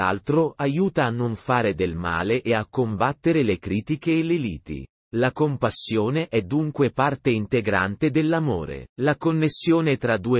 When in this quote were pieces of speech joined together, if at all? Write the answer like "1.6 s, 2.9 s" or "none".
4.9 s, 8.9 s